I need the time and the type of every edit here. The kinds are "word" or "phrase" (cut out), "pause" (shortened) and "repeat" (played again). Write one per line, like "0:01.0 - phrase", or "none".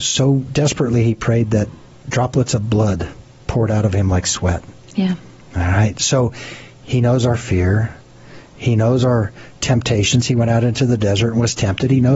none